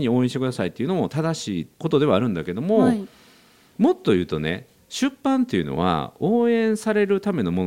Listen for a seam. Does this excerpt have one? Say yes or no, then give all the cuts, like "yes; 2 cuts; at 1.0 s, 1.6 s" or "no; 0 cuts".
no; 0 cuts